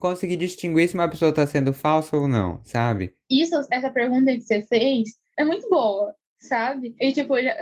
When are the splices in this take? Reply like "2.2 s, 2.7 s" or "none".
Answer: none

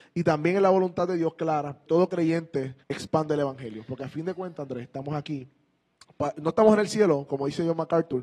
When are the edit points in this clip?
1.9 s, 2.8 s

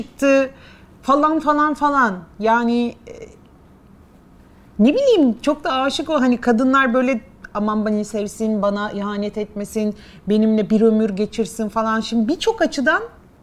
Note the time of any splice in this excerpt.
none

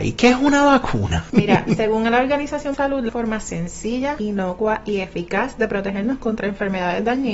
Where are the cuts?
2.7 s, 3.1 s

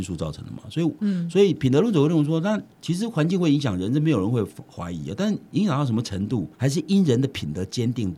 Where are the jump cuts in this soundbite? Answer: 2.7 s, 6.5 s

